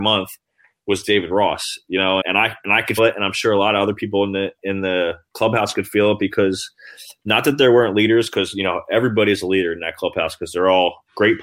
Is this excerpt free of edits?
no; 2 cuts; at 2.2 s, 3.0 s

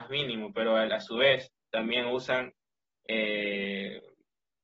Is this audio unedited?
yes; 0 cuts

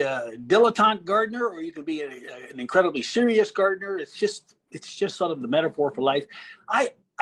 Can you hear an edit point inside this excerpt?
no; 0 cuts

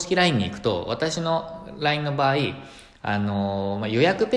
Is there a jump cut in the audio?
no; 0 cuts

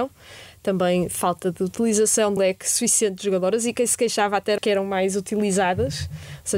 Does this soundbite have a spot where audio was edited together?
yes; 2 cuts; at 2.4 s, 4.6 s

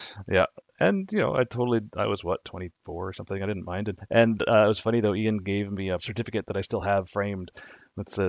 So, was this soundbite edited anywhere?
no; 0 cuts

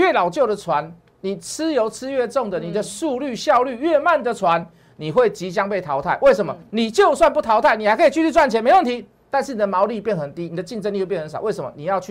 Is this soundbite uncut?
yes; 0 cuts

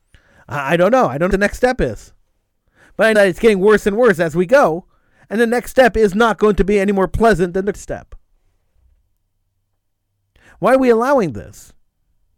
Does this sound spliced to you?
yes; 3 cuts; at 1.3 s, 3.2 s, 7.7 s

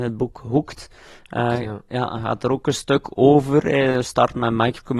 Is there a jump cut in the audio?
no; 0 cuts

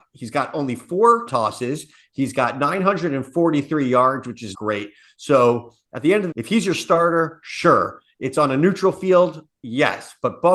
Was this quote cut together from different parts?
yes; 3 cuts; at 1.3 s, 4.5 s, 6.3 s

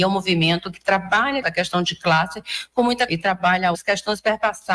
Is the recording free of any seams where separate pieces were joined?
no; 3 cuts; at 1.4 s, 3.1 s, 3.7 s

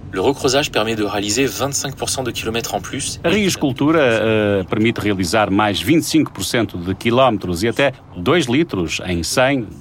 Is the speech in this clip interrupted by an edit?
no; 0 cuts

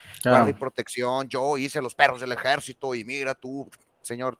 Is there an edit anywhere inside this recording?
no; 0 cuts

